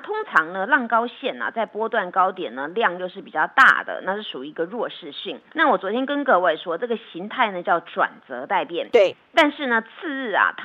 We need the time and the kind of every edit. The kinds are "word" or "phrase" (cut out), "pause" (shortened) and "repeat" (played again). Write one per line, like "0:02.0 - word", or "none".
0:05.5 - pause